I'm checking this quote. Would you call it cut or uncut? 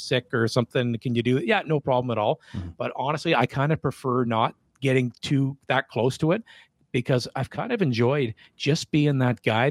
uncut